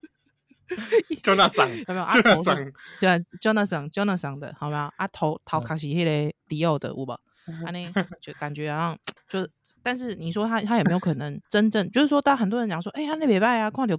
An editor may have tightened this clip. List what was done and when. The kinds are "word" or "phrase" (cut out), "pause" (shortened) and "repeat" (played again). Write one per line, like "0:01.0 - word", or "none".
0:09.2 - pause
0:11.4 - pause